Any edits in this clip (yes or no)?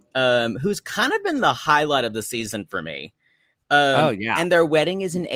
no